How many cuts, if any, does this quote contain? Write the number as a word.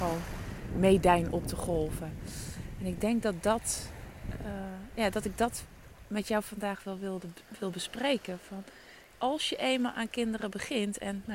one